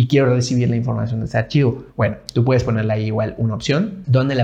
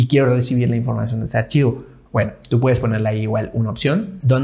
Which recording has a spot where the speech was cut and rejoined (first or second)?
first